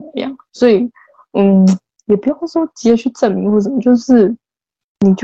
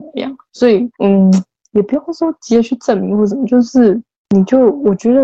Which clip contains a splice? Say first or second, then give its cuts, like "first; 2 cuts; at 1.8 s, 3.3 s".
second; 2 cuts; at 0.9 s, 4.1 s